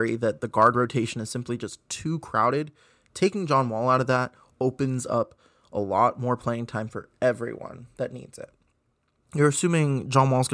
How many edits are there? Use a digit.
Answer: 0